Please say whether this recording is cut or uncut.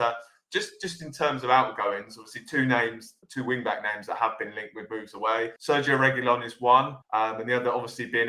cut